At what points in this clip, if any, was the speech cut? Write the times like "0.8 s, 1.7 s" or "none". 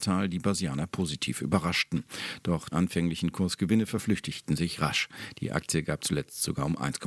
2.7 s